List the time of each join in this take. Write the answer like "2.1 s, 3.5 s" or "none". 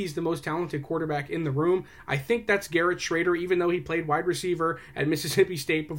none